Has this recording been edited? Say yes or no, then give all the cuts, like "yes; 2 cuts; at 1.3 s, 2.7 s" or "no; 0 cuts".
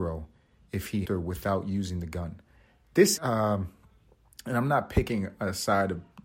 yes; 2 cuts; at 1.0 s, 3.2 s